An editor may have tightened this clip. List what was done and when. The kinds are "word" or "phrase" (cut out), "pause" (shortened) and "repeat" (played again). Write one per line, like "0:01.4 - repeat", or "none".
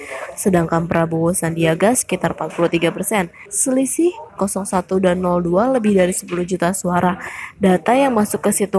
0:04.4 - phrase